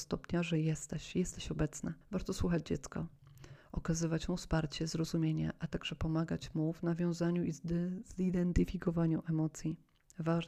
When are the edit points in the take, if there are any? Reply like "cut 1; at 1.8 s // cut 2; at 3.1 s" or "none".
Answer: cut 1; at 2.0 s